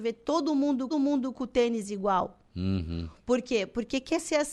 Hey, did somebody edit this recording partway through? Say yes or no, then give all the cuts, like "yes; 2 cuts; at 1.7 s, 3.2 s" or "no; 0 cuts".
yes; 2 cuts; at 0.9 s, 2.4 s